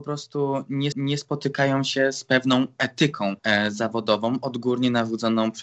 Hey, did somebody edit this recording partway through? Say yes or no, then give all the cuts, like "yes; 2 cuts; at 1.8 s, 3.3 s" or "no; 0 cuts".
yes; 2 cuts; at 0.9 s, 3.4 s